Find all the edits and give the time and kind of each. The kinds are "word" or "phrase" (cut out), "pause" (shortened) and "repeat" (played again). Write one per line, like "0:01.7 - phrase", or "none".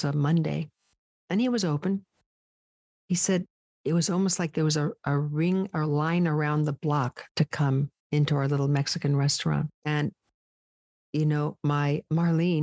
0:07.3 - pause
0:08.0 - pause
0:09.8 - pause